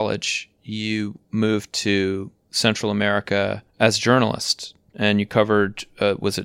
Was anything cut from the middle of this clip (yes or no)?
yes